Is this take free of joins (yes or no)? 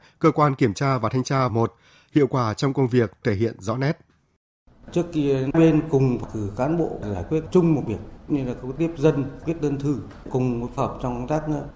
no